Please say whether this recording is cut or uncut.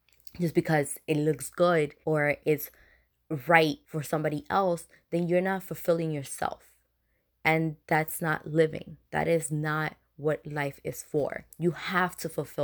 cut